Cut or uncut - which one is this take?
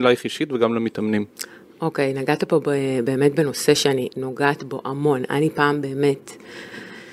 uncut